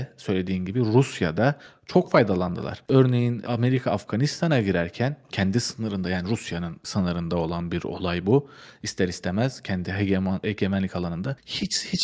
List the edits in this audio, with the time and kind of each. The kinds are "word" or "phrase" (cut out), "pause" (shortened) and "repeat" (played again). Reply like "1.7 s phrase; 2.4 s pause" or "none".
none